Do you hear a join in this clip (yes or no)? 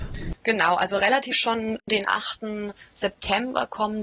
yes